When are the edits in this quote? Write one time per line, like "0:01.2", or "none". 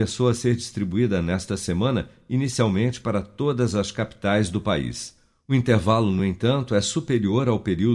none